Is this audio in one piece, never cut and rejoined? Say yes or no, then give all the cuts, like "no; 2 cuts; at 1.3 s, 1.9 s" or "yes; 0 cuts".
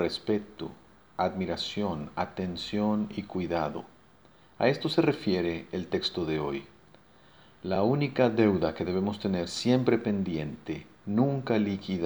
yes; 0 cuts